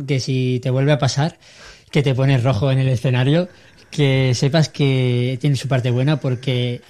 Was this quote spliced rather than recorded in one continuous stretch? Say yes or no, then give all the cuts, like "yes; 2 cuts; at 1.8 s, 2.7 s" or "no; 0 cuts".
no; 0 cuts